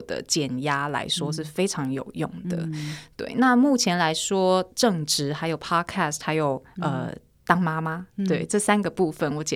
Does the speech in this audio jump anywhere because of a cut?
no; 0 cuts

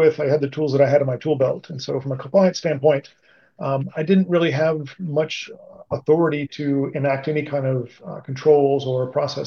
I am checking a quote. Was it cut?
no; 0 cuts

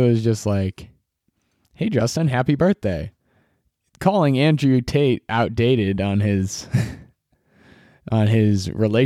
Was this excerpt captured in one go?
yes; 0 cuts

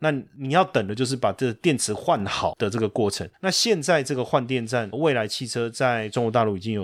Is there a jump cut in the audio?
yes; 1 cut; at 4.9 s

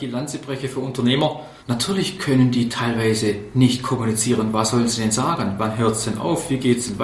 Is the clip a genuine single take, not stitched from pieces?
no; 1 cut; at 1.6 s

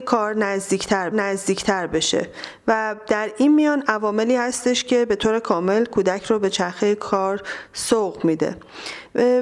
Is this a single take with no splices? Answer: no; 1 cut; at 1.1 s

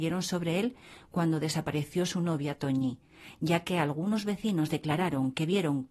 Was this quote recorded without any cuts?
yes; 0 cuts

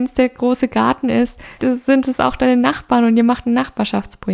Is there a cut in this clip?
yes; 1 cut; at 1.6 s

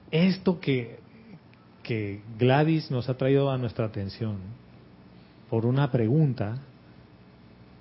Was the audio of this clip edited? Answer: no; 0 cuts

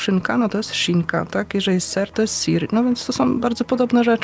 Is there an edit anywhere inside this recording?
no; 0 cuts

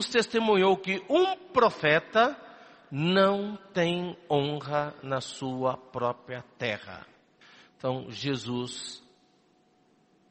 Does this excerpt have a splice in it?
no; 0 cuts

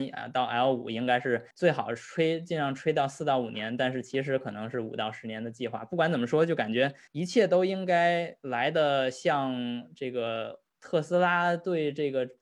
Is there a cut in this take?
yes; 3 cuts; at 1.5 s, 7.1 s, 10.7 s

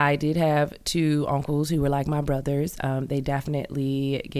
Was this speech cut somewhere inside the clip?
no; 0 cuts

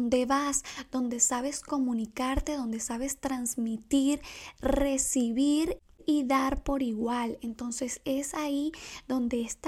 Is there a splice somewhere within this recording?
no; 0 cuts

